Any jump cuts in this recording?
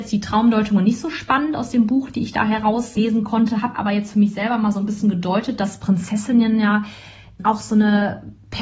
no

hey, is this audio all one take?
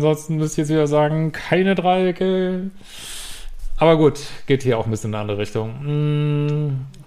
yes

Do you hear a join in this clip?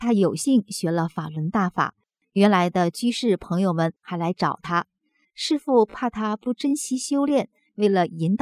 no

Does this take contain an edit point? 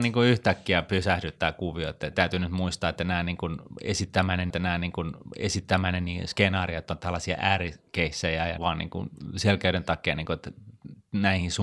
yes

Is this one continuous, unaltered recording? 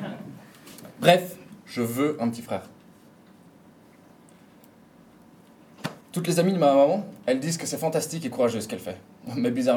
no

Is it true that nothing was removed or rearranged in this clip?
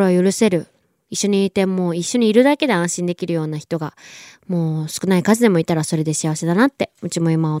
yes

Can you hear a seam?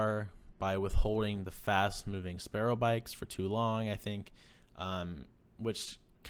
no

